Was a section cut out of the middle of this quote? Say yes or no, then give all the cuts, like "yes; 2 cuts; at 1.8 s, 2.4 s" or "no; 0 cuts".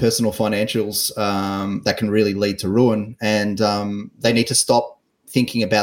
no; 0 cuts